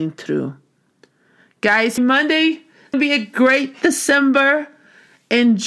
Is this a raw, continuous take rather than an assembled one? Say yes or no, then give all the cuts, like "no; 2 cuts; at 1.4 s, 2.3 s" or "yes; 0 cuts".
no; 2 cuts; at 2.0 s, 2.9 s